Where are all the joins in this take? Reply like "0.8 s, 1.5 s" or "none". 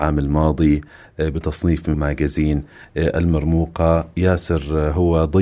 1.9 s